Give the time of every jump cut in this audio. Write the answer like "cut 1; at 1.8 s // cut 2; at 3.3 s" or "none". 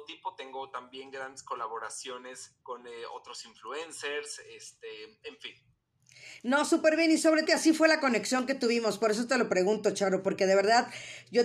cut 1; at 2.6 s // cut 2; at 7.5 s